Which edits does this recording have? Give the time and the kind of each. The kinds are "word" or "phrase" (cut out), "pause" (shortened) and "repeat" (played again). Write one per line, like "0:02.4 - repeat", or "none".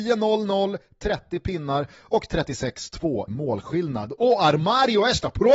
0:03.3 - word